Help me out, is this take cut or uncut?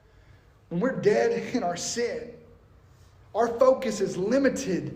uncut